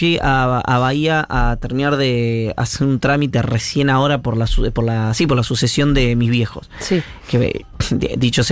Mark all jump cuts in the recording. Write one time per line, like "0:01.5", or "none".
none